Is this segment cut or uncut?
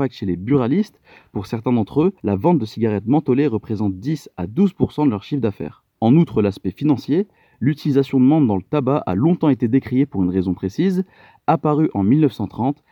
uncut